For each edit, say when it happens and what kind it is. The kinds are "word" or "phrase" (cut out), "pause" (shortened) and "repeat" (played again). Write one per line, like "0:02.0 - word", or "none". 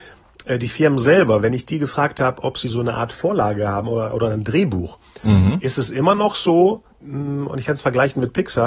0:06.9 - pause

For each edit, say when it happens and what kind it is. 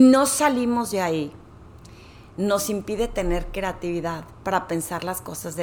none

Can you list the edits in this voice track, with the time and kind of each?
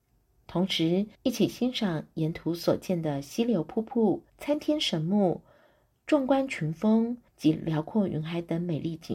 0:01.1 - pause
0:04.3 - pause
0:07.3 - pause

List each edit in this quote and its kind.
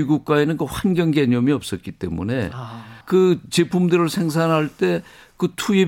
0:03.0 - pause

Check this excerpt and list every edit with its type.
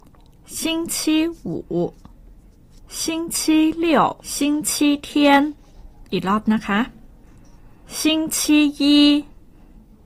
0:02.4 - pause
0:04.2 - pause
0:06.1 - pause

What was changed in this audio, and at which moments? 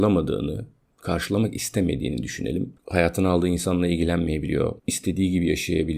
0:02.8 - pause
0:04.8 - pause

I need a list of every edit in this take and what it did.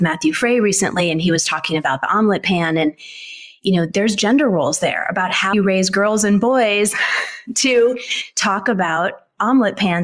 0:05.5 - word

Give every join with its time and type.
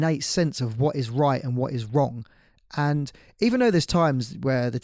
none

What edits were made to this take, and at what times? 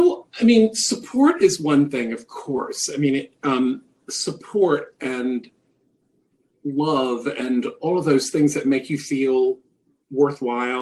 none

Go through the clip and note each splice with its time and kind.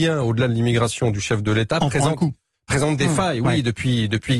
none

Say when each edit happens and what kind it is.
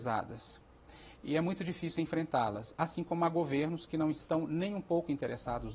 none

